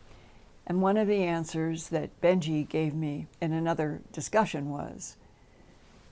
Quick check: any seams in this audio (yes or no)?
yes